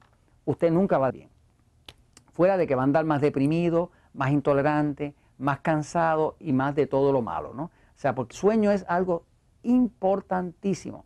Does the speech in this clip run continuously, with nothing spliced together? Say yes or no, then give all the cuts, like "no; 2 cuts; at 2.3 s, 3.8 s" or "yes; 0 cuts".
no; 2 cuts; at 1.1 s, 8.3 s